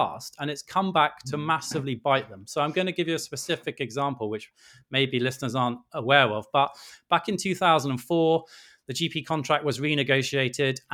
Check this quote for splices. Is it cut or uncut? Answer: uncut